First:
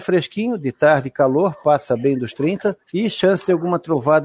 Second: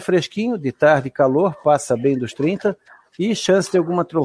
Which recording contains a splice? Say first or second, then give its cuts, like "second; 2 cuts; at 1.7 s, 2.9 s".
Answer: first; 1 cut; at 2.8 s